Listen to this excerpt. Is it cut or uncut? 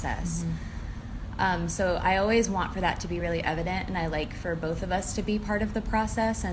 uncut